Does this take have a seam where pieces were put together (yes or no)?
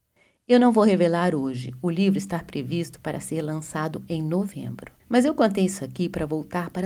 yes